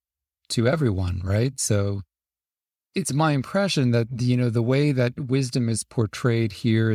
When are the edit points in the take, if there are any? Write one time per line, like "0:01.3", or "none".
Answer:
none